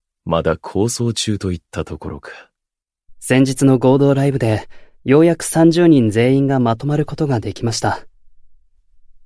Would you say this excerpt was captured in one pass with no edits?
no; 1 cut; at 4.9 s

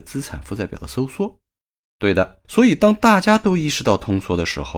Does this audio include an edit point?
yes; 2 cuts; at 1.6 s, 2.4 s

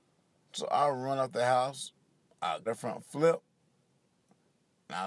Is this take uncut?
no; 1 cut; at 2.7 s

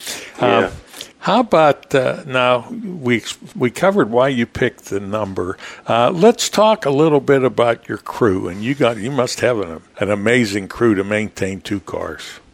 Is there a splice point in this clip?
yes; 3 cuts; at 1.1 s, 3.5 s, 9.9 s

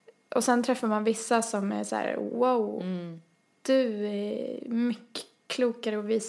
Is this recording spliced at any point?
no; 0 cuts

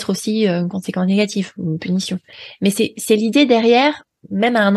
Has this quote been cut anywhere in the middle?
no; 0 cuts

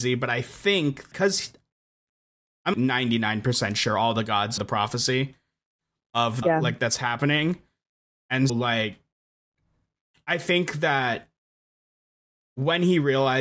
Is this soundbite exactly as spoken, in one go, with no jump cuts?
no; 5 cuts; at 1.1 s, 2.7 s, 4.6 s, 6.4 s, 8.5 s

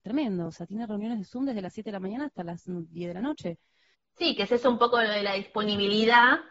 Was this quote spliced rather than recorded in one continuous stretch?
no; 0 cuts

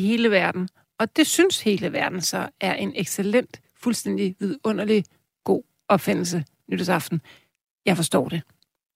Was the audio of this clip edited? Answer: no; 0 cuts

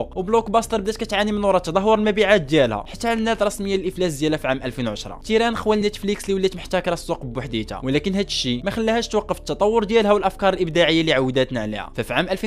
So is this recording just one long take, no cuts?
yes; 0 cuts

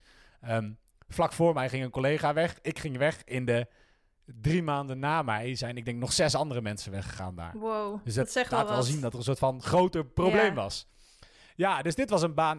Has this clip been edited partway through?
no; 0 cuts

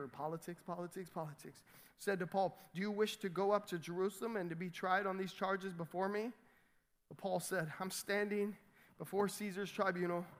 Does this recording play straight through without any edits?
yes; 0 cuts

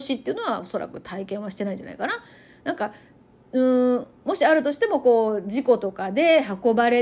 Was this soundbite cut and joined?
no; 0 cuts

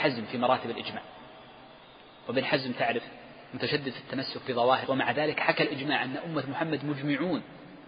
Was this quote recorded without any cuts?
no; 1 cut; at 4.9 s

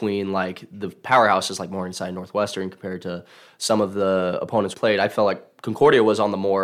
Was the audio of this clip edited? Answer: yes; 1 cut; at 4.7 s

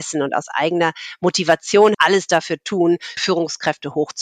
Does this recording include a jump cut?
yes; 2 cuts; at 1.9 s, 3.2 s

